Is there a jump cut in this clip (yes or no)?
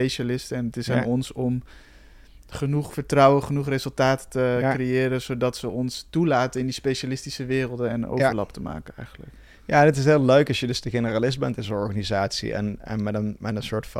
no